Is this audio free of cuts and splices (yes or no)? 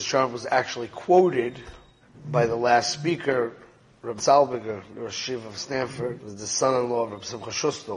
no